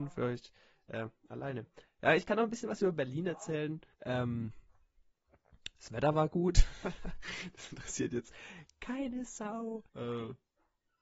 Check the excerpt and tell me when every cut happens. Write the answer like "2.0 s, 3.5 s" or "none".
3.9 s, 9.9 s